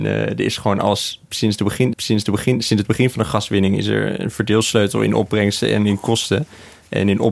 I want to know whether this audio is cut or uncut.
cut